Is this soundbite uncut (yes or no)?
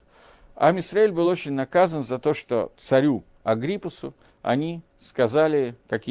yes